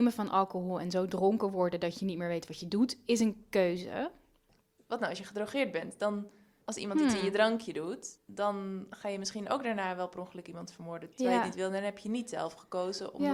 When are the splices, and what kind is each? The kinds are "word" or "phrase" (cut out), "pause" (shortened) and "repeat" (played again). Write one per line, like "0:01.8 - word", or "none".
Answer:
none